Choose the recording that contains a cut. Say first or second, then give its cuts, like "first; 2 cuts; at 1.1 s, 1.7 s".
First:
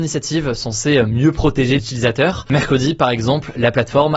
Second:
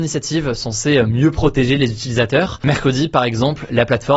first; 1 cut; at 1.8 s